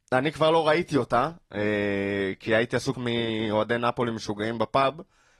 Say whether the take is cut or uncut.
cut